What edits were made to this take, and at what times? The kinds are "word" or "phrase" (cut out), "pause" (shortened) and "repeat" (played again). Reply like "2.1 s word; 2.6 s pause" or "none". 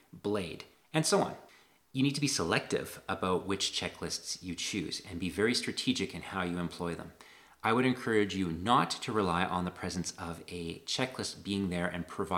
none